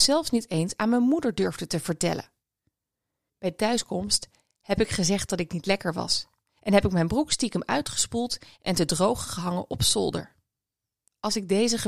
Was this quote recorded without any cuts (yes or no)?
yes